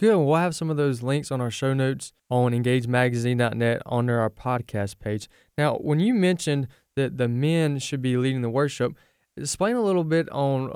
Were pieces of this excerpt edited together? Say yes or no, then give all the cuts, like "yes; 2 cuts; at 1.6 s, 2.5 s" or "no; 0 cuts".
yes; 1 cut; at 2.2 s